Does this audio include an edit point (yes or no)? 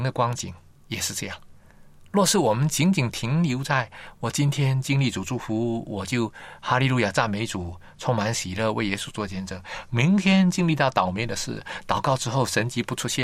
no